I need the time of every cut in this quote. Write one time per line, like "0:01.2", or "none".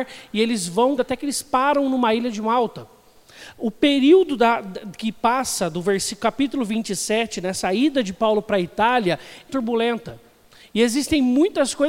0:01.0
0:09.5